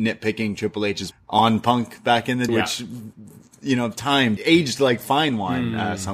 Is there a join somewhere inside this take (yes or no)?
yes